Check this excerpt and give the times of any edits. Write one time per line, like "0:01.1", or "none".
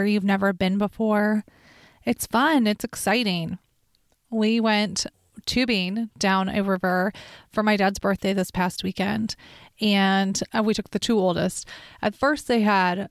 none